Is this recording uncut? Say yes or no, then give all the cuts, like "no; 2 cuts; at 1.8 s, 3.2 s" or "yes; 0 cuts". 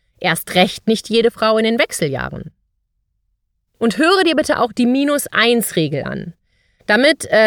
yes; 0 cuts